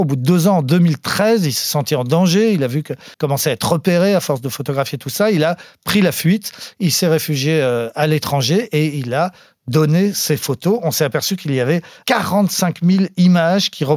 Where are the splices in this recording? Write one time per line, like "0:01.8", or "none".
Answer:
0:03.1